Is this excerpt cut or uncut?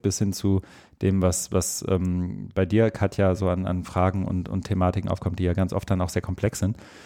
uncut